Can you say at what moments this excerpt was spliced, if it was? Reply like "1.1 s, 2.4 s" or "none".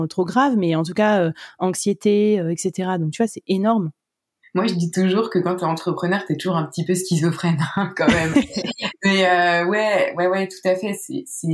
none